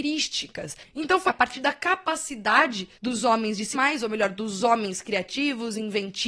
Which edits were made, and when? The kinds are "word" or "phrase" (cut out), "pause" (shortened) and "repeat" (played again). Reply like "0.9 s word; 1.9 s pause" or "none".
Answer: 1.3 s phrase; 2.9 s pause; 3.7 s word